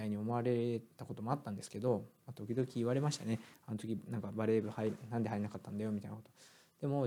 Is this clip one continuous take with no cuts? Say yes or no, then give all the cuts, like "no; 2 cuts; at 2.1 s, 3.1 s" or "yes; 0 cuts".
no; 1 cut; at 0.9 s